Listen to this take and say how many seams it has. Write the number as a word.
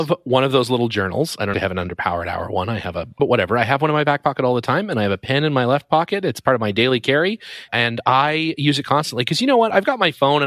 three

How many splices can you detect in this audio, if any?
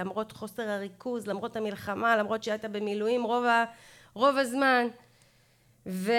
zero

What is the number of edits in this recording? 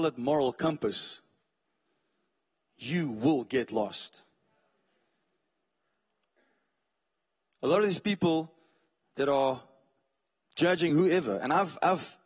zero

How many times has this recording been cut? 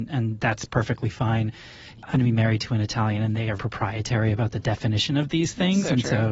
two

